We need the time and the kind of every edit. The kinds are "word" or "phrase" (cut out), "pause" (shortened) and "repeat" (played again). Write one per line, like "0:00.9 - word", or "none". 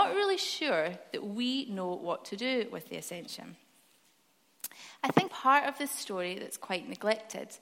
0:05.3 - word